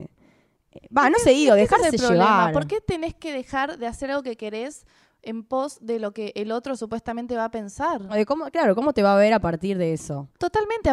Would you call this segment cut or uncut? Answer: uncut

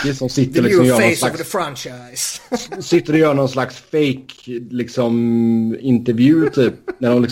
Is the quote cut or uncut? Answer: uncut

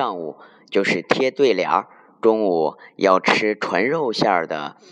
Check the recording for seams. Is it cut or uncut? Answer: uncut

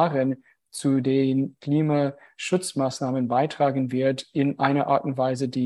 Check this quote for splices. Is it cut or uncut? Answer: uncut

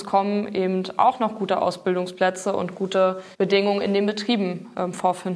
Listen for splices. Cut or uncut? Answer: cut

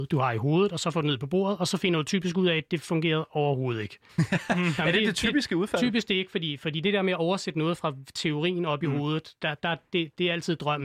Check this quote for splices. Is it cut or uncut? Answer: uncut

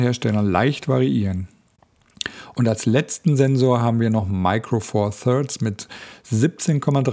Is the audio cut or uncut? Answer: uncut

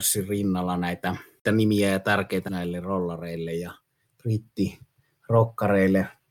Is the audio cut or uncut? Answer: cut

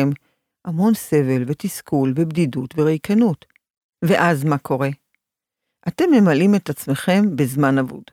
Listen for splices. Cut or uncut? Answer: uncut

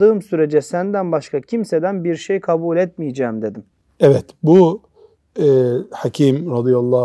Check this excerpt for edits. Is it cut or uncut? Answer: uncut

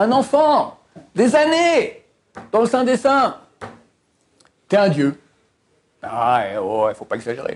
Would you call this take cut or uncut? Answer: uncut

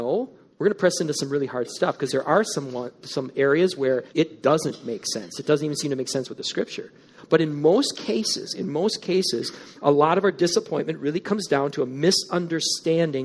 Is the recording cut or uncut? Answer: cut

